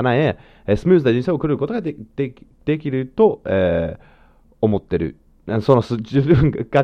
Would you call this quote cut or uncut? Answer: uncut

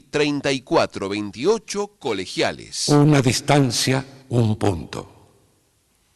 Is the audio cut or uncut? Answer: cut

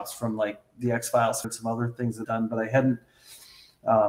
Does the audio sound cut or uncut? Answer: cut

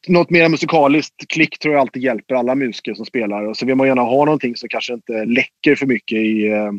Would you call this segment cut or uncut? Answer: uncut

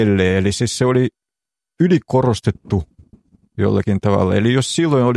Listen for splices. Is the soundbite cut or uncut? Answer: uncut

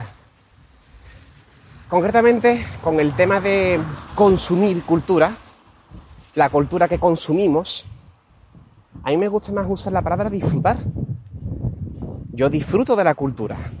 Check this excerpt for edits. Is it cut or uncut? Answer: uncut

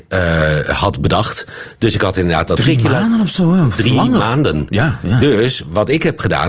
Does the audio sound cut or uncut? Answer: uncut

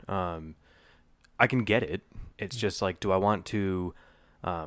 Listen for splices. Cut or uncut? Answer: cut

